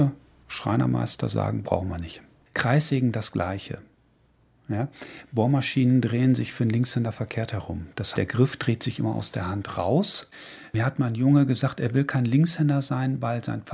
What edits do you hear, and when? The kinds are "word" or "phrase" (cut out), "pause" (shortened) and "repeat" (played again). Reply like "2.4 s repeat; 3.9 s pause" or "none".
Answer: 8.1 s word